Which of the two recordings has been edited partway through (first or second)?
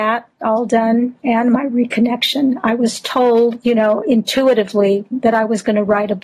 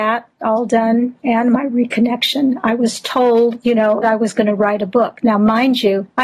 second